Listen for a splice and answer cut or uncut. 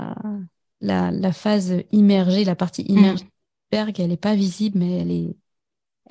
uncut